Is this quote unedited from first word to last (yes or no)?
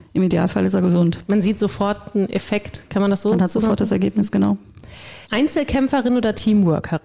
no